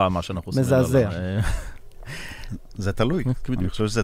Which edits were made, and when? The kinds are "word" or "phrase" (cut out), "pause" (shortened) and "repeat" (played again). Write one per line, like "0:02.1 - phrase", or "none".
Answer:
none